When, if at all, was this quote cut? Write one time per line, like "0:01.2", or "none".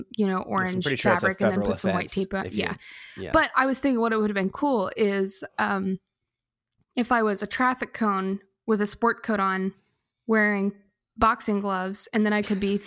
none